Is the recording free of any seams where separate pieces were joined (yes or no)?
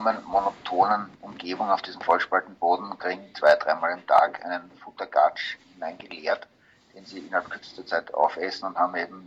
yes